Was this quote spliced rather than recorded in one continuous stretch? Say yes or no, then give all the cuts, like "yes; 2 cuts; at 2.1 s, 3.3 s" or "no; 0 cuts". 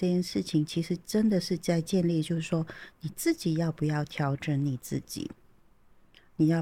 no; 0 cuts